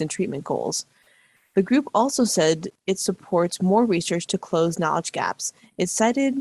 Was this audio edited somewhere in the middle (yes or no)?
no